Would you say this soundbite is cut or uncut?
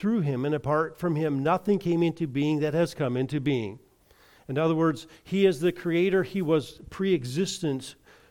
uncut